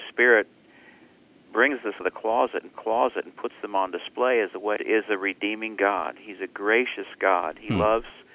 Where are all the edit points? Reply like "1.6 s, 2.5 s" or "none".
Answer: 2.0 s, 2.7 s, 4.8 s